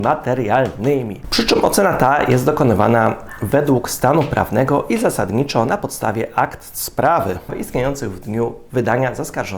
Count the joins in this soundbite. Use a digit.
0